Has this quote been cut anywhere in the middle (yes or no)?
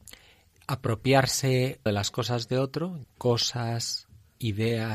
yes